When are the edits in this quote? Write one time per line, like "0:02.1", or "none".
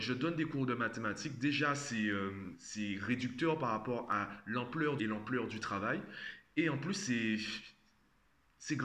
0:05.0